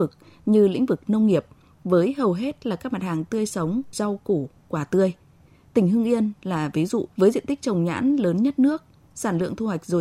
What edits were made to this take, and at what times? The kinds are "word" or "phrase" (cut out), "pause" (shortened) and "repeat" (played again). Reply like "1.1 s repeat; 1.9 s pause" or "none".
3.9 s word; 7.1 s pause